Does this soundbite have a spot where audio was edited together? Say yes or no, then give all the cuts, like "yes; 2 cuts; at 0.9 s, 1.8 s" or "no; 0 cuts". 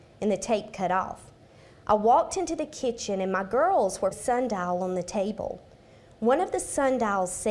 yes; 1 cut; at 4.1 s